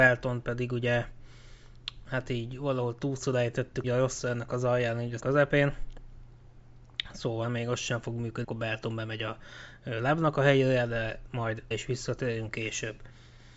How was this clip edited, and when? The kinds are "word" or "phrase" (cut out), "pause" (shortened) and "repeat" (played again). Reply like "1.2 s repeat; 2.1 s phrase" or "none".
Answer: 3.8 s word; 5.2 s word; 8.4 s word; 11.7 s word